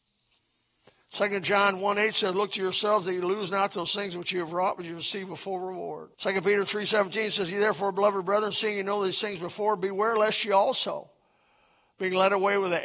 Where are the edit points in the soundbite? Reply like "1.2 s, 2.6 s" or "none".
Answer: 6.1 s